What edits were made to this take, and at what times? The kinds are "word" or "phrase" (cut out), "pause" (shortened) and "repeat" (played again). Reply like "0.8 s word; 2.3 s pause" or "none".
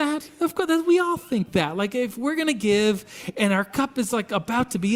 none